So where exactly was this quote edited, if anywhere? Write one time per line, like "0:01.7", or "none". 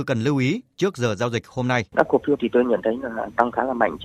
0:01.9
0:02.4